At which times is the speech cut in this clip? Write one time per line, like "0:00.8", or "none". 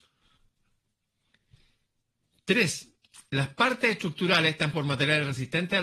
0:04.7